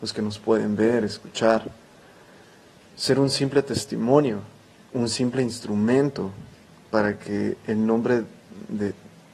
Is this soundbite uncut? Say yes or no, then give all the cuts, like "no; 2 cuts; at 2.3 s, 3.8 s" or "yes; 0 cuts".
no; 1 cut; at 4.8 s